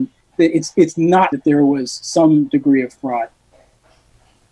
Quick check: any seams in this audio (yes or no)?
yes